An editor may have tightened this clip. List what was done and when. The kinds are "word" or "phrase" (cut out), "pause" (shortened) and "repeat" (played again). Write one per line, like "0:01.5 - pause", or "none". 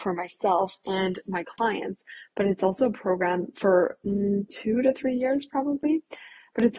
none

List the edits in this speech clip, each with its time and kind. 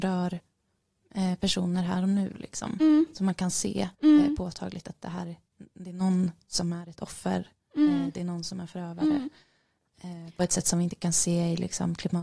0:03.9 - pause

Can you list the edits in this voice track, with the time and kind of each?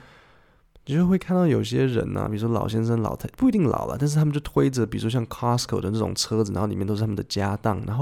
none

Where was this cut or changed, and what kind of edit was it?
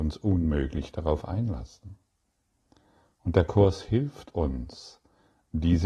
none

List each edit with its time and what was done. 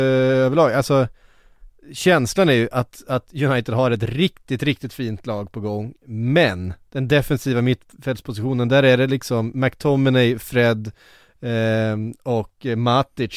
0:06.9 - pause

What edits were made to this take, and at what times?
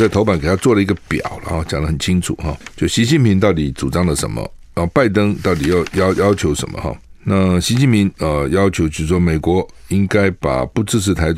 none

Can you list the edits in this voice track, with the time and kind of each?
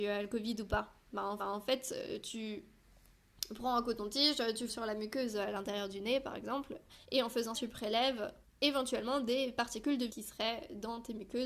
0:01.4 - repeat
0:04.7 - word
0:07.0 - pause
0:07.5 - word
0:08.4 - pause
0:10.1 - word

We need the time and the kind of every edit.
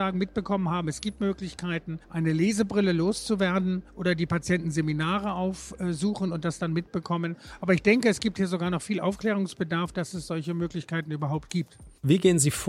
0:02.0 - pause
0:03.9 - pause

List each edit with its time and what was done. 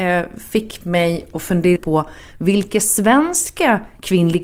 0:01.8 - word

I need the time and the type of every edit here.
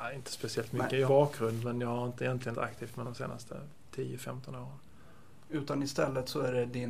0:01.1 - phrase
0:02.5 - word
0:03.0 - phrase

